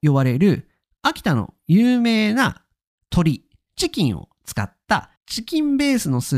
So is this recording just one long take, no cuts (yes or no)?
no